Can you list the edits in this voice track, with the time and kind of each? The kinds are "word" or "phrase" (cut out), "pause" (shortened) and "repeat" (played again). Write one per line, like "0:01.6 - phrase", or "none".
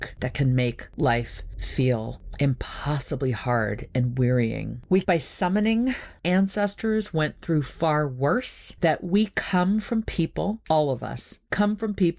0:05.0 - phrase
0:06.2 - phrase